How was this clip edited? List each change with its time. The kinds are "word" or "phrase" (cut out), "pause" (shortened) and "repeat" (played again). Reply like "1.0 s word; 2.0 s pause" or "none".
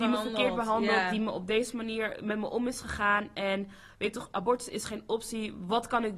none

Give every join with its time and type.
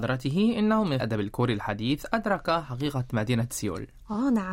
1.0 s word

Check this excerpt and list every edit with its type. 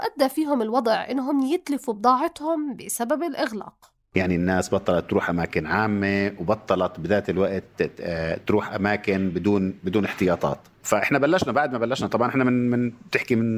none

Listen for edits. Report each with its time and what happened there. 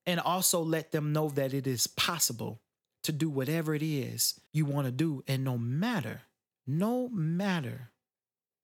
2.8 s pause; 4.5 s pause; 6.5 s pause

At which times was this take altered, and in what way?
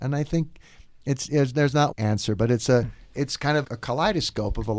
1.9 s word; 3.6 s word

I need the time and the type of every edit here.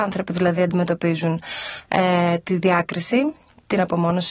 none

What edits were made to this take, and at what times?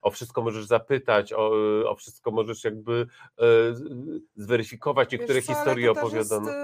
none

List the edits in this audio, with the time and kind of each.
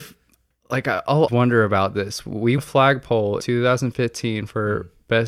1.3 s word; 2.6 s word; 3.4 s word

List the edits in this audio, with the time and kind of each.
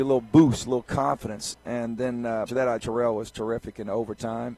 2.5 s phrase; 2.8 s phrase

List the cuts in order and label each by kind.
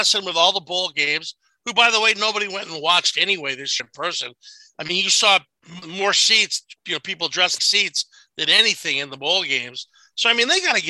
3.8 s word; 5.8 s word; 7.6 s word

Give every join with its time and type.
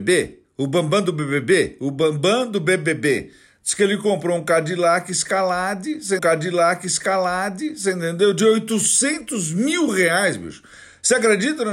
6.2 s repeat

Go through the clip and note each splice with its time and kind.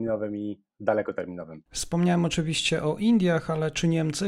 1.7 s pause

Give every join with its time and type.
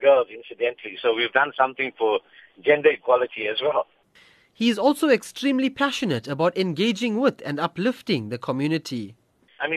none

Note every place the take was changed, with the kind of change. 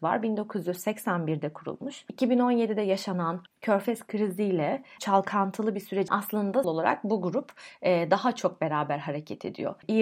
3.5 s pause; 5.0 s word; 6.1 s phrase; 6.6 s word

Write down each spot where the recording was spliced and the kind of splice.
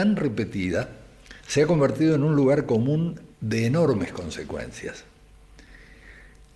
1.4 s pause; 3.3 s pause

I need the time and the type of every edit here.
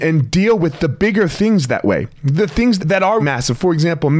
2.8 s word; 3.2 s word

